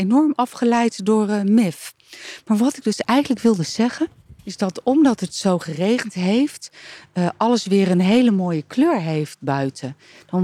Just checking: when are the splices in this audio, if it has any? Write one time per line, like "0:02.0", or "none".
0:04.4